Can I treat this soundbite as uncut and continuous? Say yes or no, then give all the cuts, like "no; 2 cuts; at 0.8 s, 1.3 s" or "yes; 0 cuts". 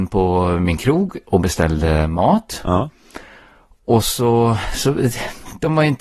yes; 0 cuts